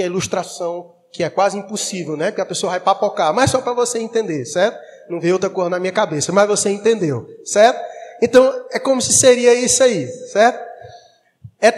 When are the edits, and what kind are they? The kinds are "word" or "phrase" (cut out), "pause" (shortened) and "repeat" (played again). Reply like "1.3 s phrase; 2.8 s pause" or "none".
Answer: none

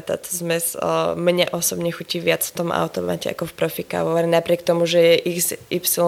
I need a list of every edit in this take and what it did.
none

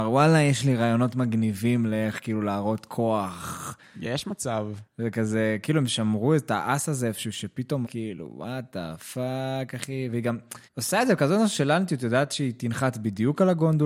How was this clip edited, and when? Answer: 4.9 s pause; 7.8 s word; 10.6 s pause

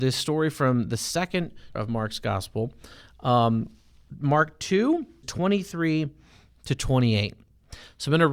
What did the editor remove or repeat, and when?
1.8 s word; 4.1 s word; 5.2 s word

